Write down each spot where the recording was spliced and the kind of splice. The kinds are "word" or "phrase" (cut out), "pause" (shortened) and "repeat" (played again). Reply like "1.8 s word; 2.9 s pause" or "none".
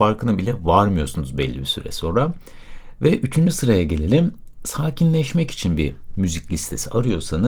none